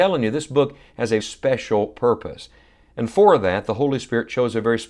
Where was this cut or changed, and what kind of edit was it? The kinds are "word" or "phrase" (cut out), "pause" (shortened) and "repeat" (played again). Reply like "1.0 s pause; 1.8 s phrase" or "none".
1.2 s word